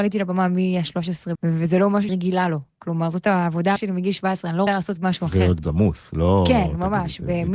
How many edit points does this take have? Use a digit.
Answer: 5